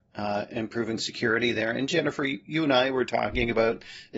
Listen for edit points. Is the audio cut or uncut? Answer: uncut